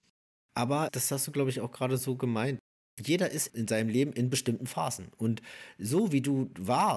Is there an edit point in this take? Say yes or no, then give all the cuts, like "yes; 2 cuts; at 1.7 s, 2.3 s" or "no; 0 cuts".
no; 0 cuts